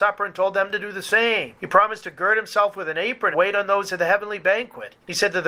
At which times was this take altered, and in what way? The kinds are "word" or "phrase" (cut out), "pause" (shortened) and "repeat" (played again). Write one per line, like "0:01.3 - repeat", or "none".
0:03.3 - word